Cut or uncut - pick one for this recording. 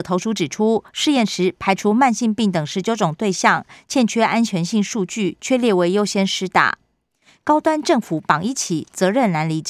uncut